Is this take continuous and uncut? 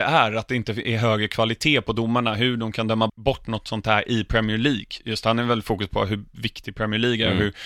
no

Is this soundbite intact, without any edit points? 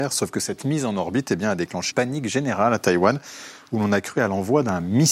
no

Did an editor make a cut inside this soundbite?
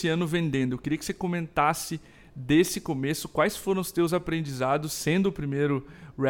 no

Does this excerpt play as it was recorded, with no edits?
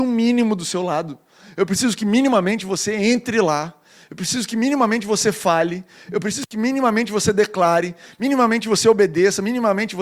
yes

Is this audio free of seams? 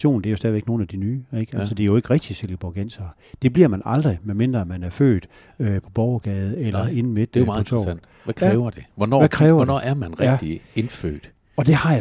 yes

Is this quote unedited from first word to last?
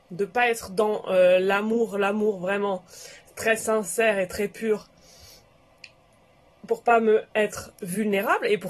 yes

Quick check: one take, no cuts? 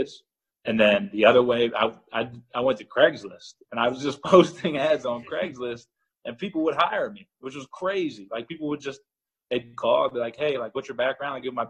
yes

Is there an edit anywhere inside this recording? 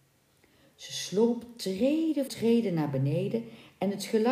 yes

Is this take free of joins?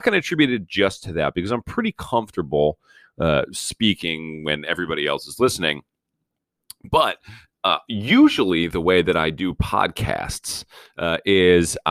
yes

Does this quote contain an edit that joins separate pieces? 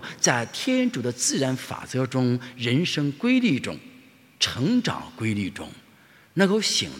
no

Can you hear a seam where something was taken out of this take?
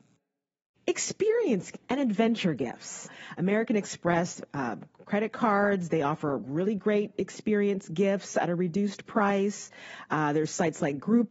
no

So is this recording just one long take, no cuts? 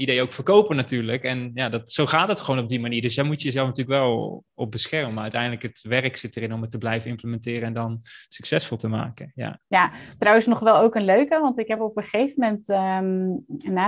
yes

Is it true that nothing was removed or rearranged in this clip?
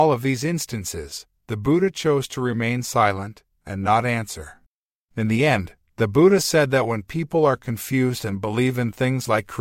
yes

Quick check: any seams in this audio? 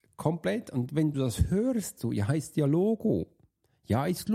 yes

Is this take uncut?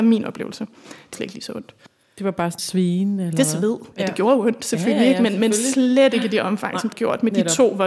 no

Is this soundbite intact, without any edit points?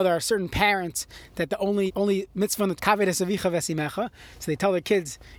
no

